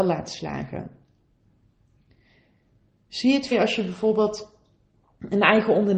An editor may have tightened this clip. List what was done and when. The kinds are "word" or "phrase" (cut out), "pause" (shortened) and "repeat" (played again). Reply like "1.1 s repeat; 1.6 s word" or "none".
3.5 s word